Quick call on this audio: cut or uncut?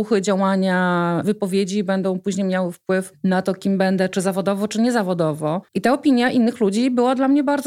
cut